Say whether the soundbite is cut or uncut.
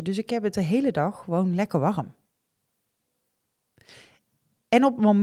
uncut